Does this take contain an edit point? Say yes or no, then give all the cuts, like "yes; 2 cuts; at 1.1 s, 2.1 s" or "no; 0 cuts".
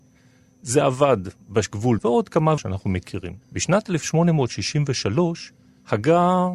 yes; 3 cuts; at 2.0 s, 2.6 s, 3.4 s